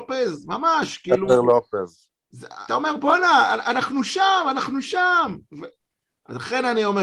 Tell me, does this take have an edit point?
yes; 1 cut; at 2.7 s

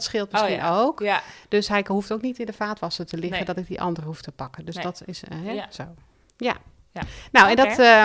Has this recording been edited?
no; 0 cuts

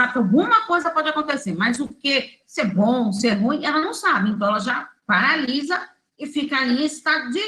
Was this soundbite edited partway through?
no; 0 cuts

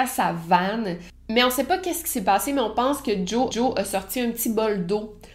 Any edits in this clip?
yes; 1 cut; at 3.5 s

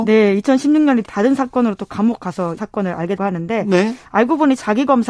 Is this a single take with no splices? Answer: no; 3 cuts; at 1.0 s, 2.6 s, 3.2 s

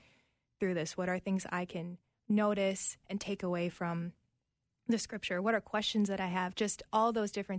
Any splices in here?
no; 0 cuts

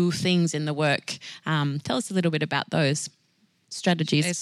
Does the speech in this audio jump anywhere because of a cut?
no; 0 cuts

